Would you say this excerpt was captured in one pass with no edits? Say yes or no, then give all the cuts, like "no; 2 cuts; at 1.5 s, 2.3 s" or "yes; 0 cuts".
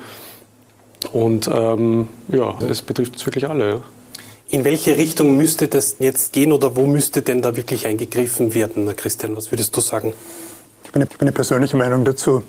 no; 3 cuts; at 2.6 s, 6.0 s, 11.1 s